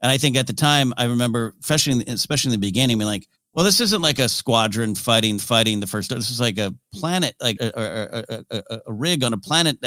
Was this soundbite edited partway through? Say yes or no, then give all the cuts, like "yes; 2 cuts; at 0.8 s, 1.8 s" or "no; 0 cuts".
yes; 3 cuts; at 3.3 s, 5.4 s, 7.6 s